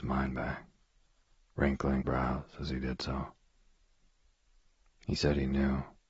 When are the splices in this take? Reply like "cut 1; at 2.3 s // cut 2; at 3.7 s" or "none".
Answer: cut 1; at 2.0 s